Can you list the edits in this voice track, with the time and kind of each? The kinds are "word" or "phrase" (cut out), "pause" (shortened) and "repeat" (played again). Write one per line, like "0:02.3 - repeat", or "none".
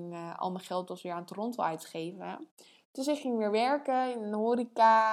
none